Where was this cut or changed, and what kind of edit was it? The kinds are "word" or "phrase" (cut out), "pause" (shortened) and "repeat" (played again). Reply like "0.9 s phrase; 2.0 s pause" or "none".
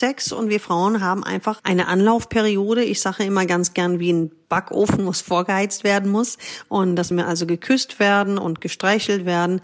1.6 s word; 7.1 s phrase